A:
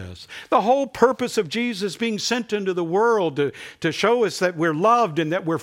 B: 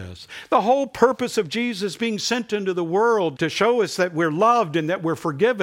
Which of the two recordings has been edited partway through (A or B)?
B